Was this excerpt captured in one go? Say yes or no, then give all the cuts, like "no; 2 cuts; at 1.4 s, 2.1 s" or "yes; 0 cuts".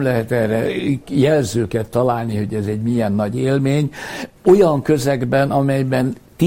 no; 1 cut; at 4.3 s